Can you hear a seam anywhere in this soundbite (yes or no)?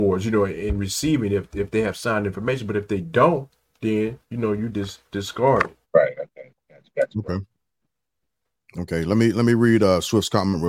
yes